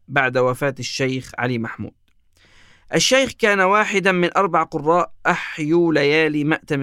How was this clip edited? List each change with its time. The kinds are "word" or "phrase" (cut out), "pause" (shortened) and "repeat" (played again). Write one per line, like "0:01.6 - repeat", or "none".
none